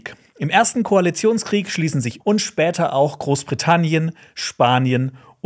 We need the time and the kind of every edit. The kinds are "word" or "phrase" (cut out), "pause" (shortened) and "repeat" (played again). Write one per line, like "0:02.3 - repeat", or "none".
0:02.2 - phrase